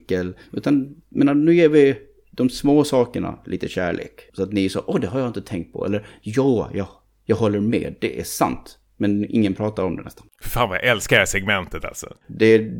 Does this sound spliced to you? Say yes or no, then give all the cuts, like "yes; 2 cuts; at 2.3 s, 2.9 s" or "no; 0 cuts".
yes; 2 cuts; at 1.0 s, 4.3 s